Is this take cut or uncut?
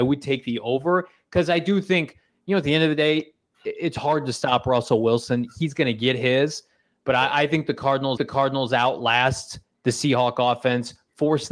cut